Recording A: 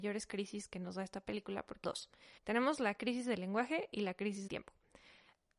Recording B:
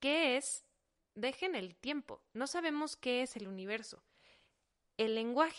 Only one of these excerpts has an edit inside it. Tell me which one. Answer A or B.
A